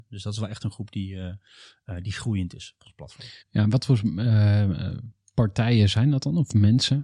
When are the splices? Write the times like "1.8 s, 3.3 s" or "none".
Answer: 3.4 s